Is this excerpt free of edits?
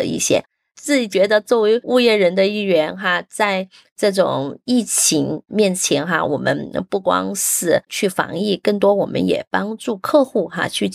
yes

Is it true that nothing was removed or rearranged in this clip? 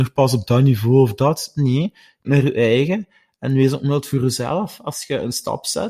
no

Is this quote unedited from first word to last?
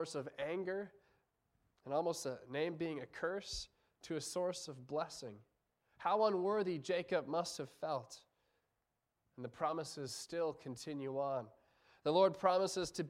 yes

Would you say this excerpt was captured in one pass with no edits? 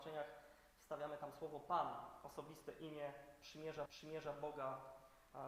no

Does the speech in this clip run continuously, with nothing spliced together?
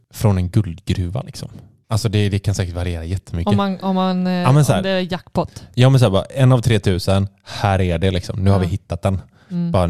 yes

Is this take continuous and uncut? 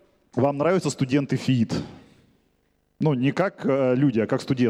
yes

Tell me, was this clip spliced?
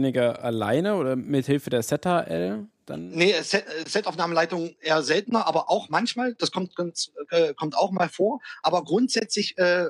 no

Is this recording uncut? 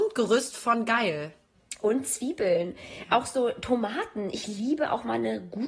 yes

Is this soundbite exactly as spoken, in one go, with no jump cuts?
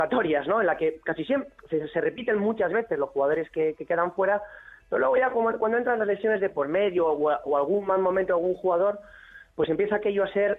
yes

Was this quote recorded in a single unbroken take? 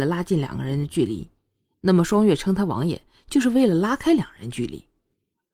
yes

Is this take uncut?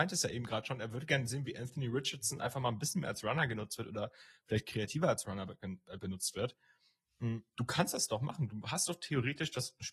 yes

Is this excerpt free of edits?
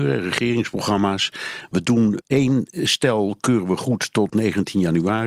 no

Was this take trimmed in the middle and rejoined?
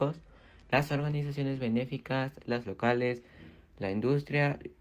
yes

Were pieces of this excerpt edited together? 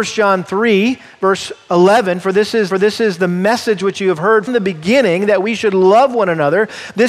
yes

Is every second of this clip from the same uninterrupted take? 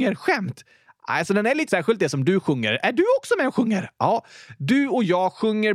no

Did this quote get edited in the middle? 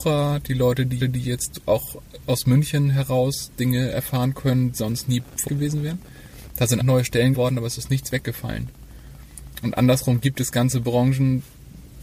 yes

